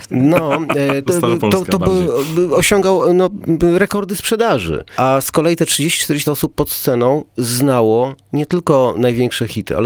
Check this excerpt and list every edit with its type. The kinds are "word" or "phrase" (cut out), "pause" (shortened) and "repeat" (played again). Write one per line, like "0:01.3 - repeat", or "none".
0:01.1 - word
0:06.2 - word

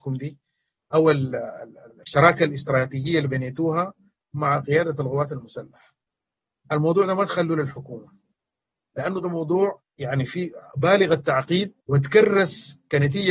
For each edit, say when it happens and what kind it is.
0:01.9 - pause
0:09.8 - pause
0:11.8 - pause

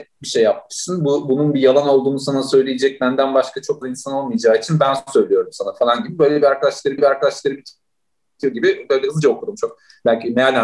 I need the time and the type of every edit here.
0:03.8 - word
0:07.0 - repeat

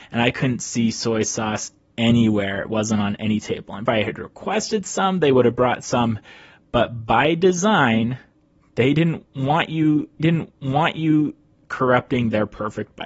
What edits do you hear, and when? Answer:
0:03.9 - phrase
0:10.2 - repeat

